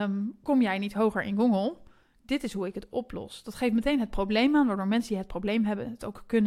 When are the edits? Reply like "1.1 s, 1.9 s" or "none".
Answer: none